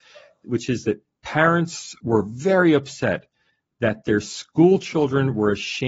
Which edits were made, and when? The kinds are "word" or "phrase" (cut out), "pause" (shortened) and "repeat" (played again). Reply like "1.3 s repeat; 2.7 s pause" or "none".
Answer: none